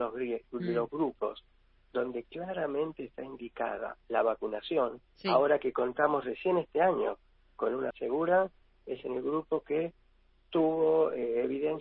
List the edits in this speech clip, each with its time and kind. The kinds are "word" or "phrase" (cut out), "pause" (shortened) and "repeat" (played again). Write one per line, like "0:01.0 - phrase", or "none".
0:05.1 - pause
0:07.9 - word